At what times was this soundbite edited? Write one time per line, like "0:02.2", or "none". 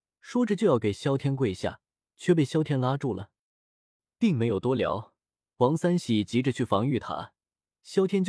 none